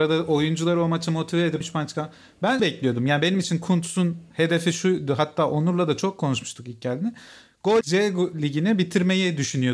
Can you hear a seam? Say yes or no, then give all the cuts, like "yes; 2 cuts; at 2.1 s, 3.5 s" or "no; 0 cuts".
yes; 3 cuts; at 1.6 s, 2.6 s, 7.8 s